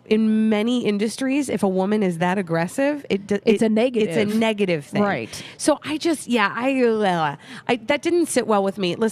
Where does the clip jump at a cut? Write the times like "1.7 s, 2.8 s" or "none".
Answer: none